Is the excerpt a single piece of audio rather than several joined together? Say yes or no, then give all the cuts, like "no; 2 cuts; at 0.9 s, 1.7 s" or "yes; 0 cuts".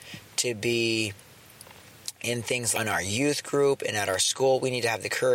no; 1 cut; at 2.7 s